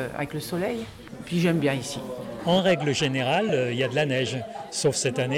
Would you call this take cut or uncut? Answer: uncut